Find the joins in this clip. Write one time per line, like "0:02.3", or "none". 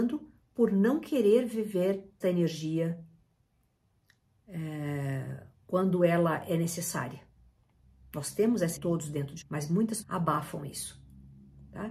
0:02.2
0:08.8
0:09.4
0:10.0